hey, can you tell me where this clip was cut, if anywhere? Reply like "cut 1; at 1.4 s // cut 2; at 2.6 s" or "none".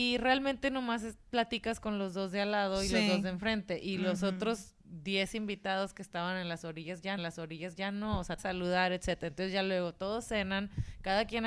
cut 1; at 4.8 s // cut 2; at 7.2 s // cut 3; at 8.4 s